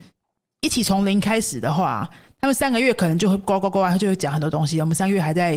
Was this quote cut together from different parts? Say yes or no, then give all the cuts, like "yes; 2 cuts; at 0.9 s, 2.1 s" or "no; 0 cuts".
no; 0 cuts